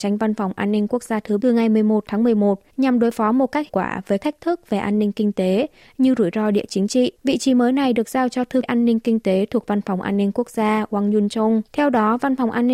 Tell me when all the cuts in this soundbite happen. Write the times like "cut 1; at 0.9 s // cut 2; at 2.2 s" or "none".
cut 1; at 1.4 s // cut 2; at 2.7 s // cut 3; at 3.7 s // cut 4; at 4.2 s // cut 5; at 7.2 s // cut 6; at 8.6 s // cut 7; at 11.7 s